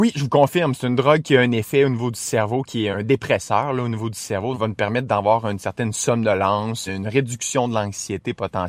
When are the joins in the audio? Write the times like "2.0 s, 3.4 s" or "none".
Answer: 2.9 s, 4.5 s, 6.9 s